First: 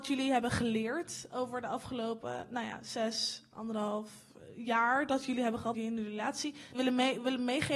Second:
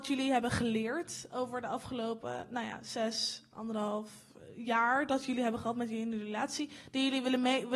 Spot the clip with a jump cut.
first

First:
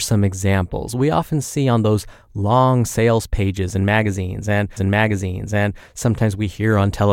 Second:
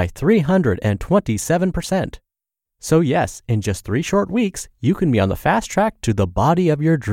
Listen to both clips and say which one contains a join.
first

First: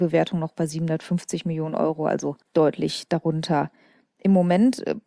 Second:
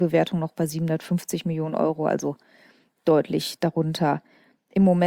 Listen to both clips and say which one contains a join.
first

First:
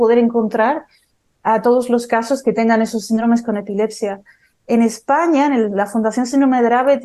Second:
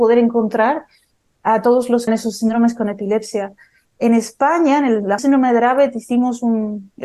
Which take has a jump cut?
second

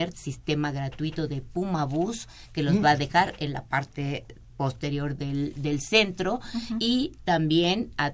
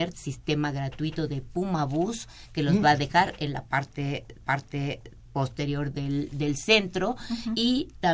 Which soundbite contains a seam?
second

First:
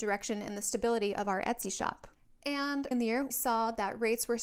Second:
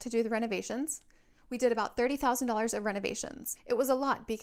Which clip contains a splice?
first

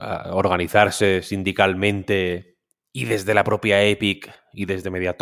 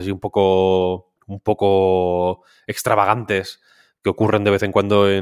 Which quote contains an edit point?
second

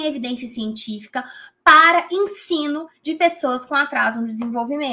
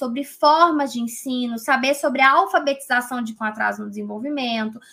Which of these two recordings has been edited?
second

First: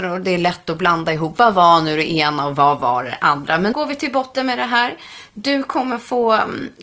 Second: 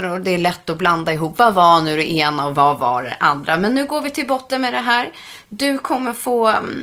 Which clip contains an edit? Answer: first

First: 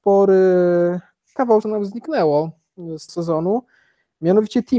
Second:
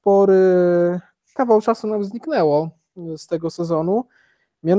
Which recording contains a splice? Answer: first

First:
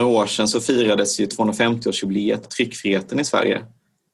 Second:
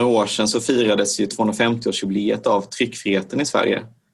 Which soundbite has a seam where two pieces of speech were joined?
first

